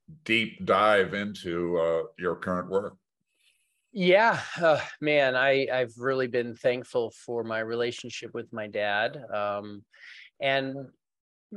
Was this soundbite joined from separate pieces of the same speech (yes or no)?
no